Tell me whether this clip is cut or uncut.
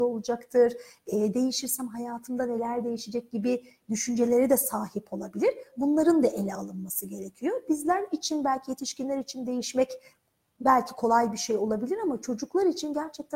uncut